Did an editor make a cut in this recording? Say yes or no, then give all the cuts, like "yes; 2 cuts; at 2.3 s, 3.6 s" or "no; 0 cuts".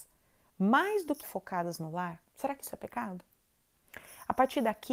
yes; 2 cuts; at 1.2 s, 2.3 s